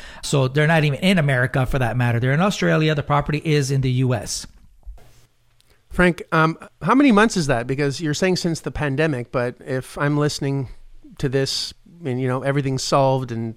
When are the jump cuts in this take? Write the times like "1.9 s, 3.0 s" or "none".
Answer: none